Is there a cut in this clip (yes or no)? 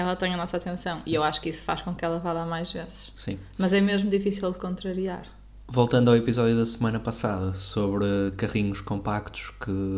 no